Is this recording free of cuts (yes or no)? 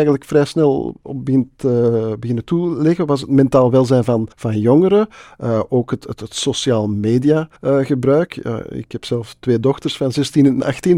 no